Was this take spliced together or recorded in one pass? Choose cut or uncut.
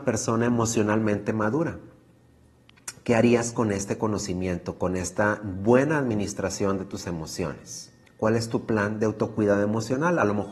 cut